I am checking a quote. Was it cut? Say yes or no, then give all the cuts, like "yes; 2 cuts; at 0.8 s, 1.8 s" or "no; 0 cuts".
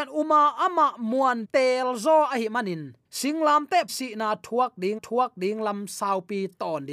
yes; 4 cuts; at 1.4 s, 3.0 s, 3.9 s, 5.0 s